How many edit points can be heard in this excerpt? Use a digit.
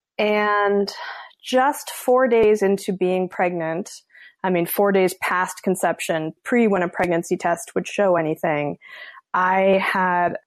0